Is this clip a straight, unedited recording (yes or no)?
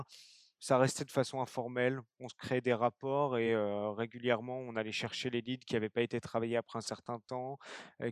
yes